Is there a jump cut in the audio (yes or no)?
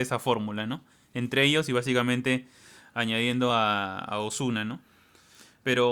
no